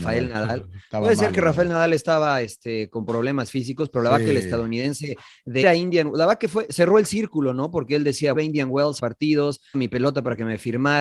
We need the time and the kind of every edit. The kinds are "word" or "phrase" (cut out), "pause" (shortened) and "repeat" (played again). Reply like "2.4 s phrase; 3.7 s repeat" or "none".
5.6 s word; 8.3 s phrase; 9.0 s phrase; 9.7 s word